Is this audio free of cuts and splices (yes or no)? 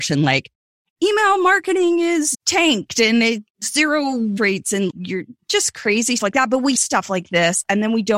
no